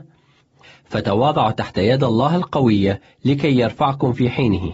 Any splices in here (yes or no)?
no